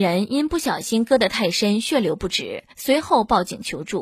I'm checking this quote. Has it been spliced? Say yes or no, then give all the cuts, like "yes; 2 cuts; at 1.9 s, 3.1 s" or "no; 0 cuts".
yes; 1 cut; at 2.7 s